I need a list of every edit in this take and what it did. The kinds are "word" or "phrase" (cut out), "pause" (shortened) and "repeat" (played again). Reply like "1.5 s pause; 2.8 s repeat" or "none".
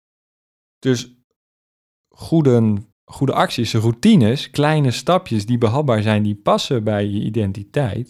2.9 s pause